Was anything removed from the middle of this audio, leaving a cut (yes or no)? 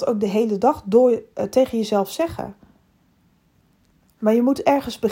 no